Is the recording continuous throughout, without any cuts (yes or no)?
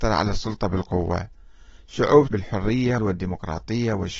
no